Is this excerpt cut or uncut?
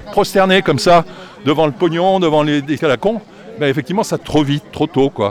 cut